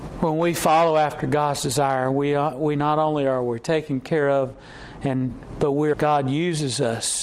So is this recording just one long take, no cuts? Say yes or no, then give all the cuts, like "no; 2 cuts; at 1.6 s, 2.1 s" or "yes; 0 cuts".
no; 1 cut; at 5.9 s